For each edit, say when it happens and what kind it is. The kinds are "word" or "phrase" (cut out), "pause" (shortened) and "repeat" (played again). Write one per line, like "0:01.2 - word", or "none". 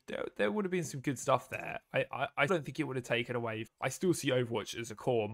0:02.5 - word
0:03.7 - word